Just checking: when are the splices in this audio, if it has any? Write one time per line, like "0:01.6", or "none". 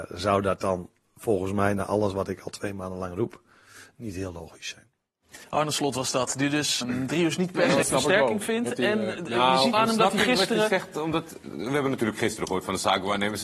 0:06.8
0:07.8
0:09.7